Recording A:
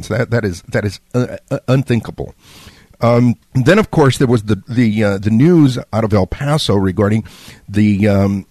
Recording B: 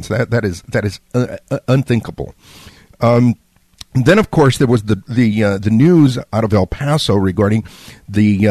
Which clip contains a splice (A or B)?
A